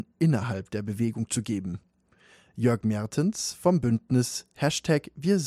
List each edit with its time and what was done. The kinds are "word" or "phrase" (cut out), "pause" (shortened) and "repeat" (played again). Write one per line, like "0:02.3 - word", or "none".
none

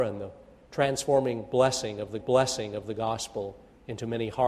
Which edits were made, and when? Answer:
0:02.2 - repeat

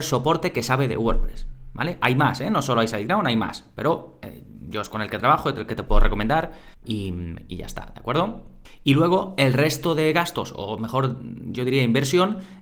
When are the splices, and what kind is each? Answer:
0:06.7 - pause

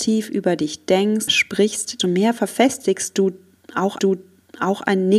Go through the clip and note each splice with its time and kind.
0:01.3 - word
0:02.0 - word
0:04.0 - repeat

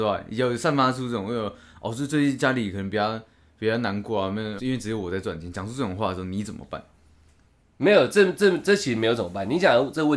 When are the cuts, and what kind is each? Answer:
0:04.6 - word

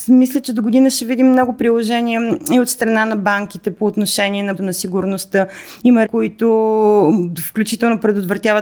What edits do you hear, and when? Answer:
0:04.6 - word
0:06.0 - word

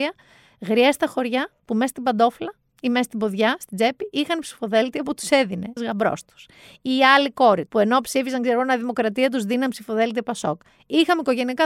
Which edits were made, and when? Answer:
0:05.8 - word
0:07.7 - word

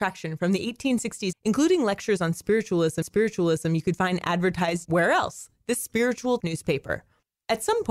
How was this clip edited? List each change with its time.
0:01.3 - word
0:03.0 - repeat
0:04.8 - word
0:06.4 - word

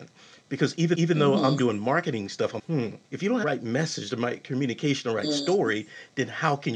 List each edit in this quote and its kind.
0:00.9 - repeat
0:02.6 - word
0:03.0 - pause
0:03.4 - phrase

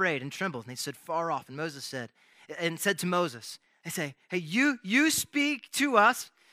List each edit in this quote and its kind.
none

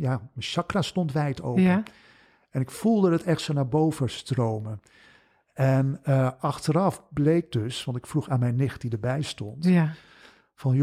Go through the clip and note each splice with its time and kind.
none

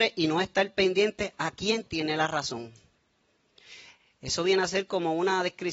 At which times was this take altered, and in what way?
none

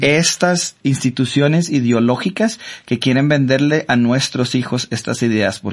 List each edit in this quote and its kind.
none

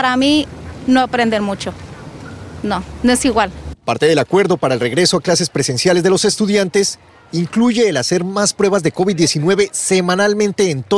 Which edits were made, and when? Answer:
none

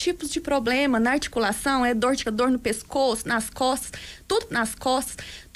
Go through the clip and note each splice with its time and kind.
0:02.2 - word
0:04.5 - repeat

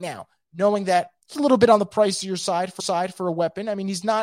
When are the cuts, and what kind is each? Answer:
0:01.3 - word
0:02.8 - repeat

